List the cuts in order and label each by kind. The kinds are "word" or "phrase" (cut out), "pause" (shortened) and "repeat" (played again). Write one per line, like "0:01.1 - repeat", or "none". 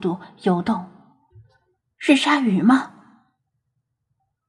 0:01.3 - pause

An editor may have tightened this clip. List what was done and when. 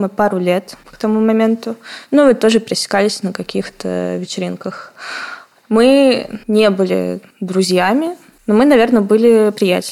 0:06.4 - pause
0:07.3 - pause

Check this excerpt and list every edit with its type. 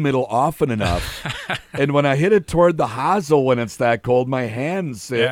none

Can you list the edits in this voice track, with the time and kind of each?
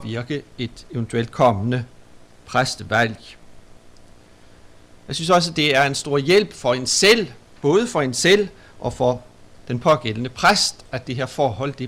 none

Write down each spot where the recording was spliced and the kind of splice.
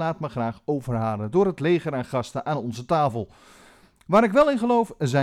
none

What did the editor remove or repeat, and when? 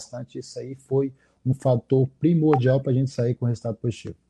none

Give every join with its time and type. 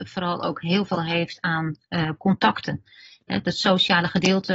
none

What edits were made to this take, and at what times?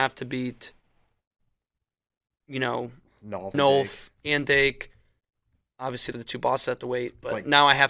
0:03.5 - word
0:04.2 - pause
0:06.1 - word

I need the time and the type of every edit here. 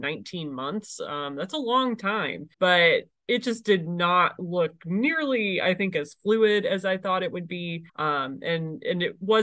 0:02.5 - pause
0:07.9 - pause

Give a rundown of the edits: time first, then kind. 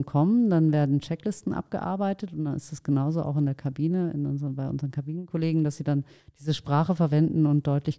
none

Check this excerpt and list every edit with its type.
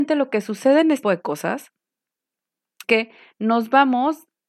0:01.0 - word
0:02.8 - word

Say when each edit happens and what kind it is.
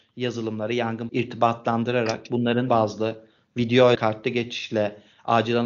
0:01.1 - word
0:02.7 - word
0:03.9 - word

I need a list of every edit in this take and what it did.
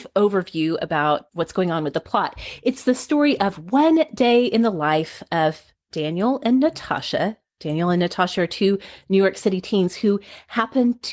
0:01.3 - word

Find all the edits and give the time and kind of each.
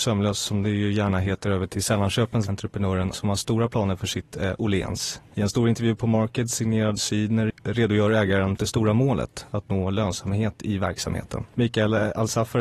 0:02.5 - phrase
0:03.1 - phrase
0:07.0 - word
0:08.6 - phrase

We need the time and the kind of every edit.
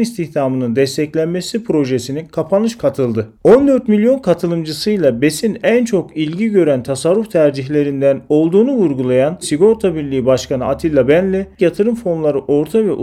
0:02.8 - word
0:03.4 - pause
0:09.4 - word
0:11.6 - word

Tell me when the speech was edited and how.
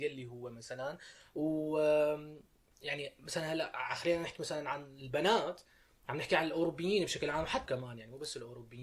0:07.7 - word

